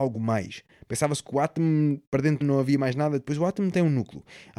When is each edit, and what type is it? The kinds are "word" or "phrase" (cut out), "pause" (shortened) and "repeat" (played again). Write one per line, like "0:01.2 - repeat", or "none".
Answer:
0:02.4 - phrase

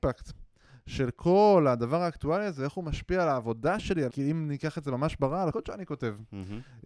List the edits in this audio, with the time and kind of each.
0:04.1 - word
0:05.5 - word

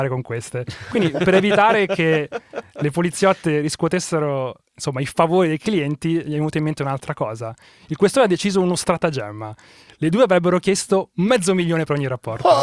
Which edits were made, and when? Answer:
none

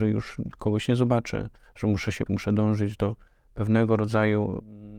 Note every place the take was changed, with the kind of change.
0:02.3 - word

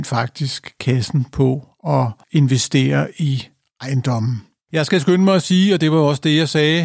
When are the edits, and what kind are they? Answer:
none

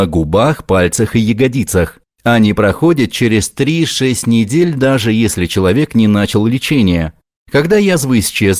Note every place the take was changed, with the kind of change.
none

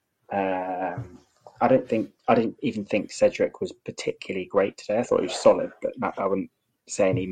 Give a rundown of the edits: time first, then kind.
none

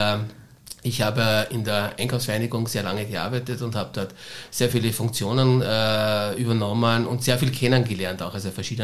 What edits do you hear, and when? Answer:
none

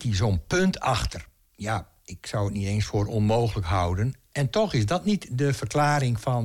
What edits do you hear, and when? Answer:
0:01.4 - pause

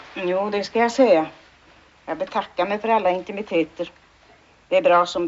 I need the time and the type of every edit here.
none

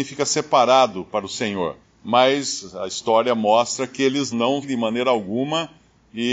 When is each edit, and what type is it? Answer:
0:01.8 - pause
0:04.3 - word
0:04.6 - phrase

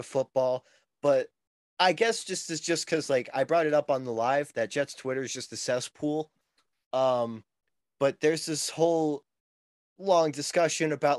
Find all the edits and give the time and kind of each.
none

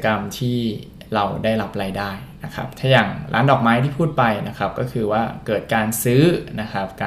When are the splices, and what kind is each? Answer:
none

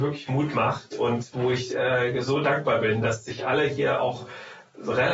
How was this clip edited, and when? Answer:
none

